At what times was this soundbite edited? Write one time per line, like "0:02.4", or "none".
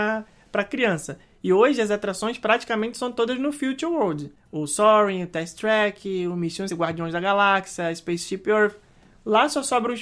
0:06.7